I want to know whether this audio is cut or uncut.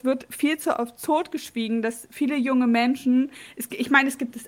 uncut